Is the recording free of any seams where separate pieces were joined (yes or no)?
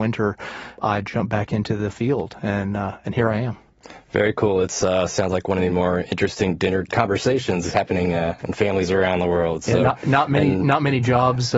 yes